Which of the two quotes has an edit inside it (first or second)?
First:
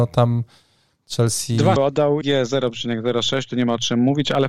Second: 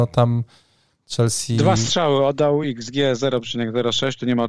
first